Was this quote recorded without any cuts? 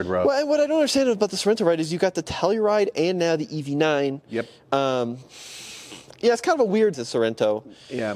no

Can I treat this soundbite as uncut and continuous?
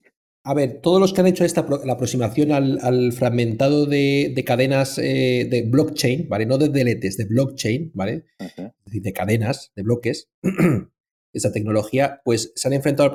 yes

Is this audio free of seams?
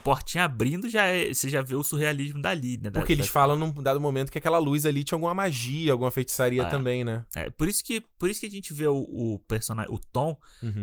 yes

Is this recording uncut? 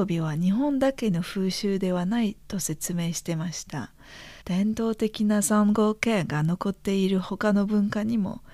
no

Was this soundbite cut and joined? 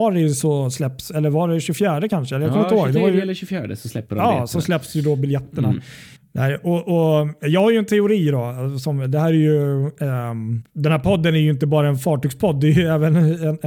no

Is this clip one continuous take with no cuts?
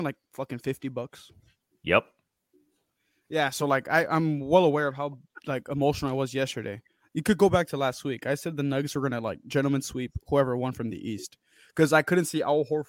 yes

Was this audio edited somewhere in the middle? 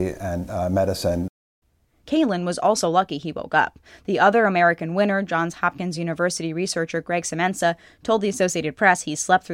no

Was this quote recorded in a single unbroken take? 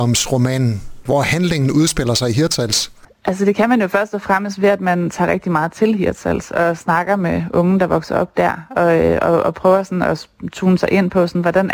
yes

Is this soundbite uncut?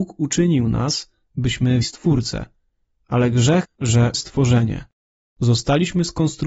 no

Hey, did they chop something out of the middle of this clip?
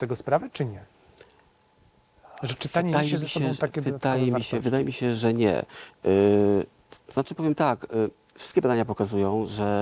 no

